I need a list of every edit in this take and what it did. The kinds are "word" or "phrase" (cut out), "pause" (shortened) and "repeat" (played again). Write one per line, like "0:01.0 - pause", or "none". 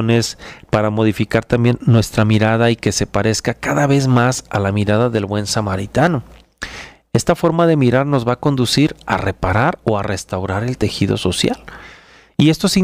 none